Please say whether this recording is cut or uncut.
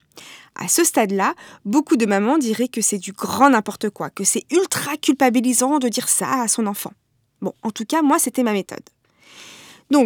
uncut